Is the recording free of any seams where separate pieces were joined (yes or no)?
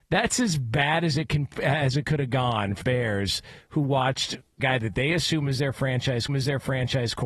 no